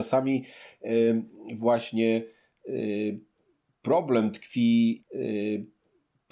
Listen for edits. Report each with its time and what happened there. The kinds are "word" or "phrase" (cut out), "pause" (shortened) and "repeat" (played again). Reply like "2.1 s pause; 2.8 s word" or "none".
5.0 s repeat